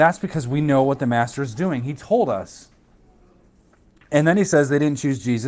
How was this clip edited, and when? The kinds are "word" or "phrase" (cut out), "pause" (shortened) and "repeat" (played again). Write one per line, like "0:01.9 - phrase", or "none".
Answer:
none